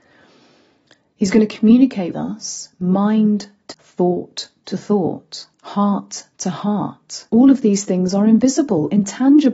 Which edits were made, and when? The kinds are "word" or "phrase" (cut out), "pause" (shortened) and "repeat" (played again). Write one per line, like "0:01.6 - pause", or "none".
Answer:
0:02.1 - word
0:03.7 - word
0:05.5 - pause
0:07.3 - pause